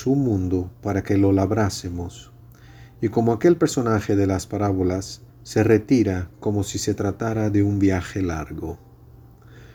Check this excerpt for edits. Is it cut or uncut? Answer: cut